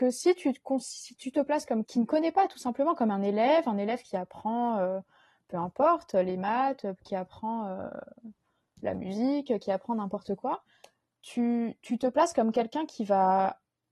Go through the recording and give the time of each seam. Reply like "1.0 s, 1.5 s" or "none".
1.8 s